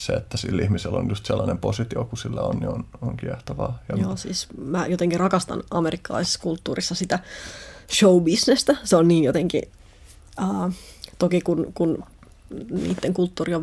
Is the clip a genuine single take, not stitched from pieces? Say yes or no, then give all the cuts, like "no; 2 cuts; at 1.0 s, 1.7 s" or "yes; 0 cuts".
yes; 0 cuts